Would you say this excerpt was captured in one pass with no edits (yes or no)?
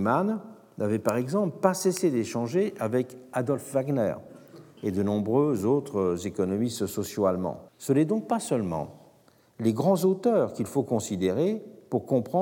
no